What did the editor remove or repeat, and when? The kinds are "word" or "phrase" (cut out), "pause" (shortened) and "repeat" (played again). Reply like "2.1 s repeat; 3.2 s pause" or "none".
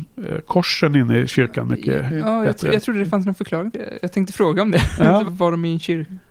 5.2 s word